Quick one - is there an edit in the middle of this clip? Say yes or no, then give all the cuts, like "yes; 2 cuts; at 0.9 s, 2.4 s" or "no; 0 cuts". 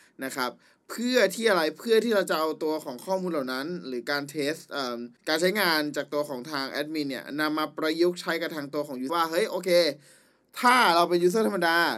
yes; 2 cuts; at 5.2 s, 9.1 s